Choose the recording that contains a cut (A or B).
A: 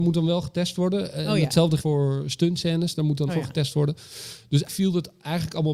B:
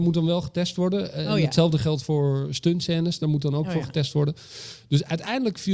A